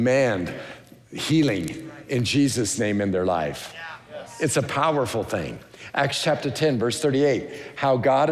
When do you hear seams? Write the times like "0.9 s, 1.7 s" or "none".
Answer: none